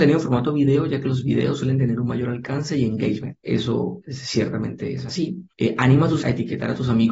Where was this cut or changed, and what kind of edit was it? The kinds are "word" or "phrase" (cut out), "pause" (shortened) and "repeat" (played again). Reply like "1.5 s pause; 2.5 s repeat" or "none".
5.5 s pause; 6.2 s word